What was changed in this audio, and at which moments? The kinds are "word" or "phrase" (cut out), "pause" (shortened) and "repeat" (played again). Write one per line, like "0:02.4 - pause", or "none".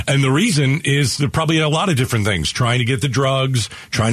none

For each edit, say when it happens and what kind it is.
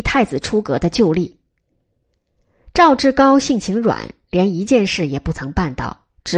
none

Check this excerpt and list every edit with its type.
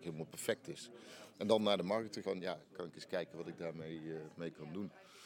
0:02.2 - word

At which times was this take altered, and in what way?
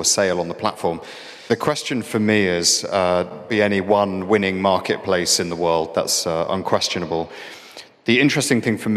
0:03.5 - phrase

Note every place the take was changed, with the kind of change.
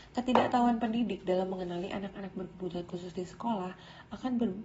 none

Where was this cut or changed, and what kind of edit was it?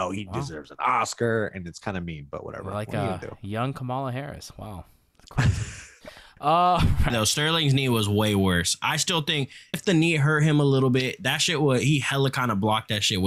0:07.1 - phrase
0:09.7 - word

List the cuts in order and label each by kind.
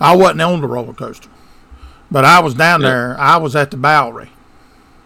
none

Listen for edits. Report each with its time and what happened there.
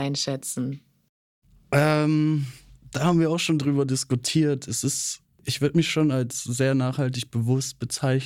none

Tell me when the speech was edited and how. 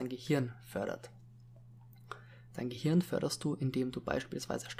none

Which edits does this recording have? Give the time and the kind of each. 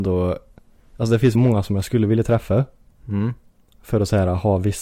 0:01.3 - word

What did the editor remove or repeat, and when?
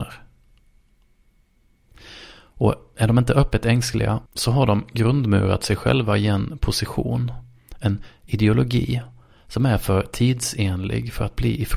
0:04.3 - pause

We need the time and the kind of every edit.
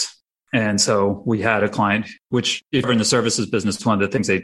0:02.8 - word

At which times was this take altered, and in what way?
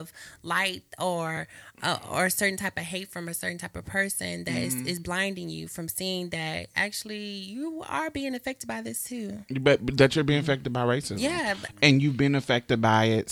none

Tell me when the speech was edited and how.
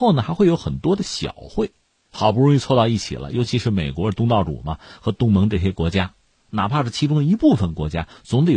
none

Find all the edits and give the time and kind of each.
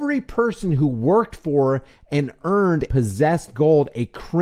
0:02.9 - word

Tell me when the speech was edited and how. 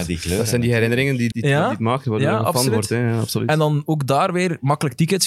0:01.3 - word

